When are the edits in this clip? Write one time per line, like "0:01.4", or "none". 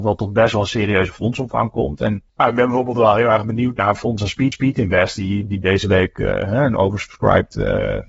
0:02.3
0:04.5